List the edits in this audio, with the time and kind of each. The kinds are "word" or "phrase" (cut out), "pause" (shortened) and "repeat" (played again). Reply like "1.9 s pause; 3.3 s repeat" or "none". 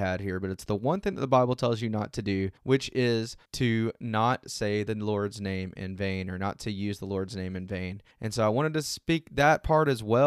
2.6 s pause; 3.5 s pause; 8.1 s pause